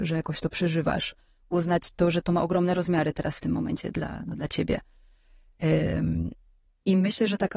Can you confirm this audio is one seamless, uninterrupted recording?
yes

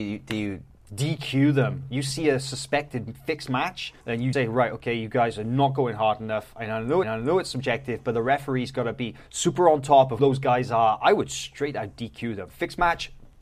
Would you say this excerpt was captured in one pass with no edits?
no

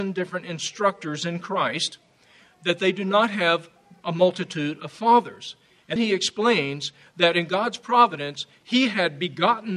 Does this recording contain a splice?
yes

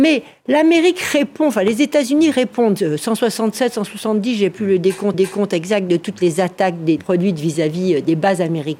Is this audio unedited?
no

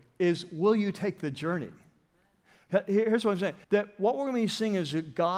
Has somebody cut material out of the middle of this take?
yes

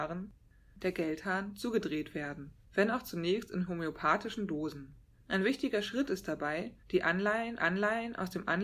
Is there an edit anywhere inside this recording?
yes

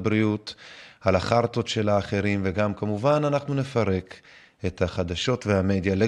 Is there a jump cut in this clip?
no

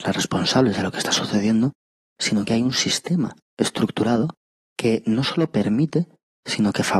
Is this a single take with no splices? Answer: yes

